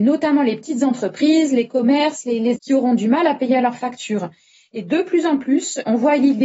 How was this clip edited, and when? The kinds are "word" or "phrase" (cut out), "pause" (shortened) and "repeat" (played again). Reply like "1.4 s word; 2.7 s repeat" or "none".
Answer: 2.6 s word